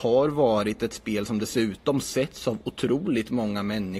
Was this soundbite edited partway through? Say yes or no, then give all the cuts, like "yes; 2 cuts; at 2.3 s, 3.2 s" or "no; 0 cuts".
no; 0 cuts